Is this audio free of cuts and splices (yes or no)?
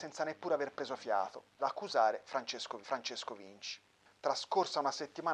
no